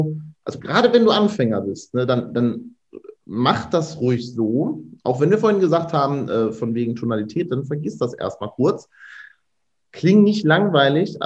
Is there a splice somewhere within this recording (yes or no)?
no